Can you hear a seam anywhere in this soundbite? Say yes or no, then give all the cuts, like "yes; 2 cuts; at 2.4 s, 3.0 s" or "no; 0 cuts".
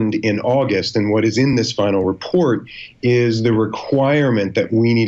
no; 0 cuts